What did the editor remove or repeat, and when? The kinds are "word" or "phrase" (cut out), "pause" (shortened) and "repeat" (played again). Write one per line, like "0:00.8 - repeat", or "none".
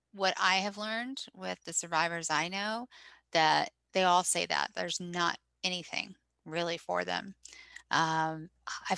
none